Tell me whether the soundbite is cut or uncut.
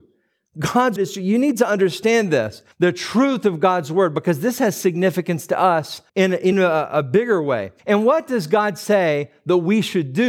cut